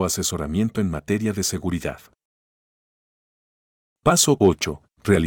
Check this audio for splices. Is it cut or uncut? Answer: uncut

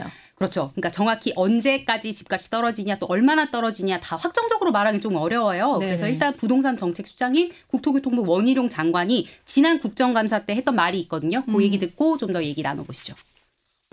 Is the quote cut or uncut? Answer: uncut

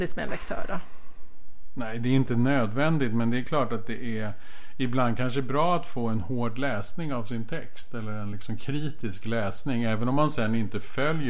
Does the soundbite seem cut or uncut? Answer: uncut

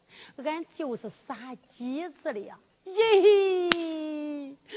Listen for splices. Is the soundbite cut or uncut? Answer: cut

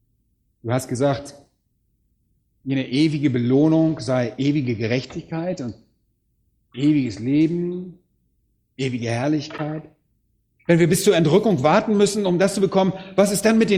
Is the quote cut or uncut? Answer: uncut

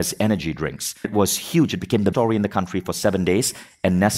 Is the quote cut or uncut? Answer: cut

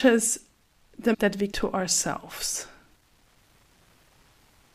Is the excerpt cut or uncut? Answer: cut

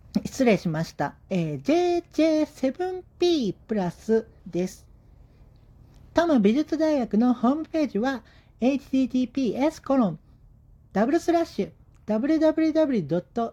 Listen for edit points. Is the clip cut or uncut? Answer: cut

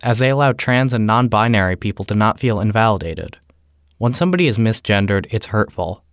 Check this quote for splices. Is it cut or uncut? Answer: uncut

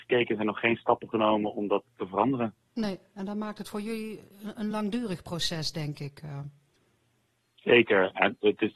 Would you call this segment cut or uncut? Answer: uncut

